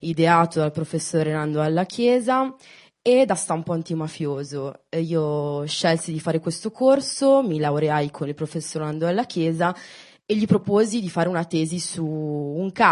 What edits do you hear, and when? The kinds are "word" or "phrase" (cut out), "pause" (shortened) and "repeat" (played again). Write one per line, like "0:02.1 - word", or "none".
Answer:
none